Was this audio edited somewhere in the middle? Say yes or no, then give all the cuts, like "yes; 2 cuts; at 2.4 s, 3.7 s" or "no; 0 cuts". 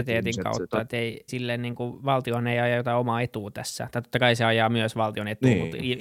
yes; 1 cut; at 1.3 s